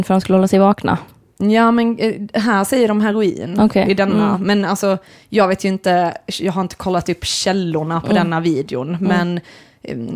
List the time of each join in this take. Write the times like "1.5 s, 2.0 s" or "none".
none